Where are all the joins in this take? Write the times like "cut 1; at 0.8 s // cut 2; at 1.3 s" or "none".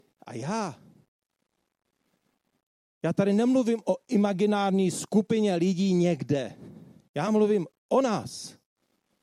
none